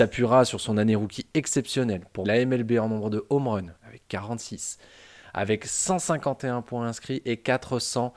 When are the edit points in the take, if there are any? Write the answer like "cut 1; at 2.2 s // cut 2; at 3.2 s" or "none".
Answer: cut 1; at 2.2 s // cut 2; at 3.8 s